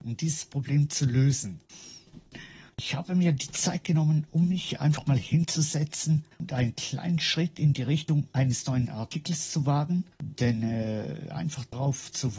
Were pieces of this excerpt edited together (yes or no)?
no